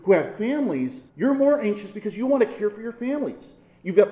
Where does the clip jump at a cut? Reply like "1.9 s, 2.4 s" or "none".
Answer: 1.1 s